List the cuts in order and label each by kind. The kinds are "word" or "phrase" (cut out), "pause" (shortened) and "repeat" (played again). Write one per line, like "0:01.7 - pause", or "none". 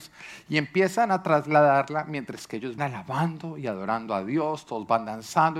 0:02.8 - word